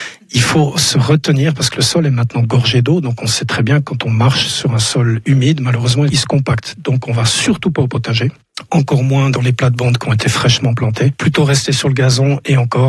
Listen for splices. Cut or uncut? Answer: uncut